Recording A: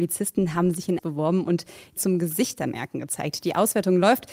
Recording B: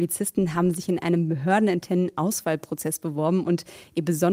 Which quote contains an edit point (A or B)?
A